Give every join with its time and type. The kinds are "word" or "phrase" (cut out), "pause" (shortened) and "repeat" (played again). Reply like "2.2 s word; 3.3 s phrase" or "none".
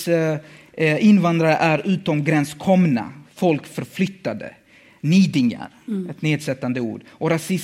none